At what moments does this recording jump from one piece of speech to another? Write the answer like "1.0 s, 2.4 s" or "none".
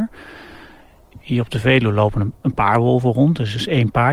none